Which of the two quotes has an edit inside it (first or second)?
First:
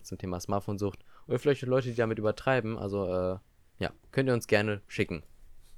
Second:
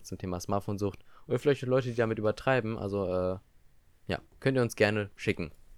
first